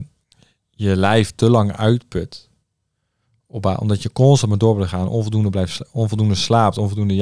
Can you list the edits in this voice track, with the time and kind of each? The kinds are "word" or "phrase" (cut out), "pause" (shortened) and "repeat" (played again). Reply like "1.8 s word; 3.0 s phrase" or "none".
none